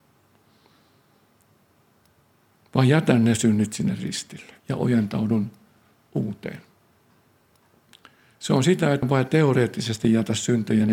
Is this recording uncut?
no; 2 cuts; at 4.6 s, 9.0 s

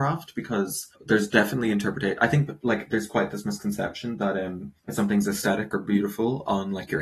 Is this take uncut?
no; 2 cuts; at 0.9 s, 4.8 s

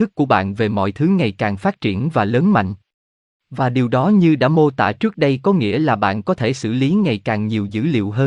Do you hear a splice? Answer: no; 0 cuts

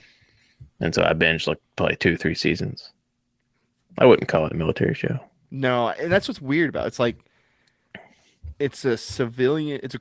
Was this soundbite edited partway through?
no; 0 cuts

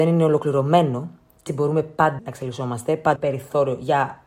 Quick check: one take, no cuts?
no; 3 cuts; at 1.5 s, 2.2 s, 3.2 s

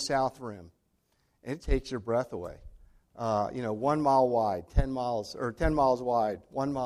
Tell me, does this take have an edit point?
yes; 1 cut; at 1.6 s

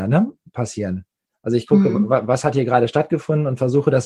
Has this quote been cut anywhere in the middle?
no; 0 cuts

